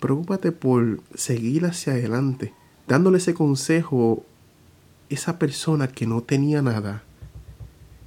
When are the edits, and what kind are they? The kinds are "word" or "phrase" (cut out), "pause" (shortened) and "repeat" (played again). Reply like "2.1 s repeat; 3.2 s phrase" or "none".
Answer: 1.1 s pause; 2.7 s pause